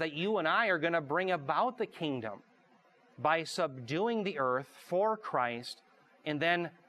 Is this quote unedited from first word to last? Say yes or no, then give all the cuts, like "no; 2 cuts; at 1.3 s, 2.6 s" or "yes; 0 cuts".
yes; 0 cuts